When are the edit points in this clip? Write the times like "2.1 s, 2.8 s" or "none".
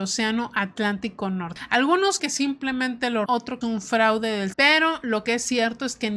2.2 s, 3.3 s, 3.6 s, 4.5 s

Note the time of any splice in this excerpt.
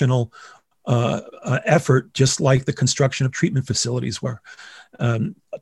none

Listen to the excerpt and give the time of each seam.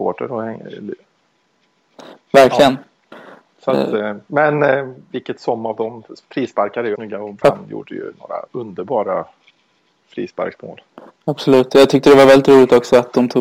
5.0 s, 7.0 s, 7.4 s, 8.5 s

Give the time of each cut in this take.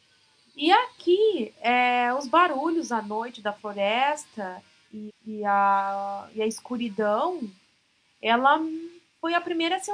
5.1 s

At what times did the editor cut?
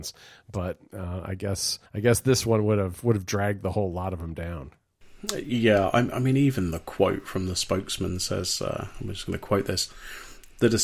1.9 s

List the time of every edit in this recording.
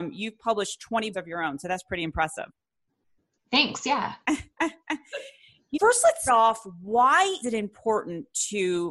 1.1 s, 5.7 s, 6.3 s, 7.4 s

